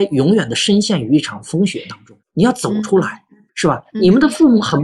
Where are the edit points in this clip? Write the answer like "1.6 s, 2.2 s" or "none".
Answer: 2.2 s, 3.5 s